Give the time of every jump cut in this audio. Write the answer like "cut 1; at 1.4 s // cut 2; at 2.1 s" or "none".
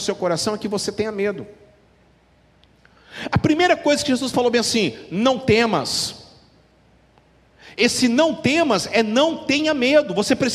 none